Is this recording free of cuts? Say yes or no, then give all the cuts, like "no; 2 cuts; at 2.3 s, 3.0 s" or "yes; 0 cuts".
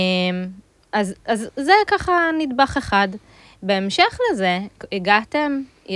yes; 0 cuts